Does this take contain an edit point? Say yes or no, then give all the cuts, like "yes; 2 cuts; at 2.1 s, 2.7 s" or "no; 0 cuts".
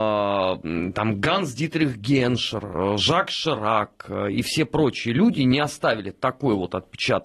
no; 0 cuts